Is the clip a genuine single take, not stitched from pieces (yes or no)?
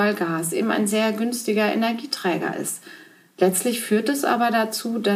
yes